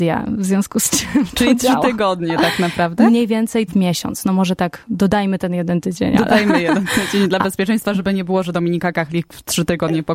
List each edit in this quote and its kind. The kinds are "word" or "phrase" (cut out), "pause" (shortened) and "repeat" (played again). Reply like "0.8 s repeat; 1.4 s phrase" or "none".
3.7 s phrase